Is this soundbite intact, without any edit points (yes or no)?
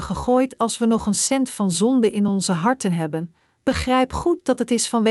yes